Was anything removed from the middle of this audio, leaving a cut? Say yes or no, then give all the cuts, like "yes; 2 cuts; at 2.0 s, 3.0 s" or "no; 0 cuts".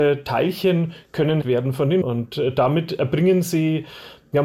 yes; 2 cuts; at 1.4 s, 2.0 s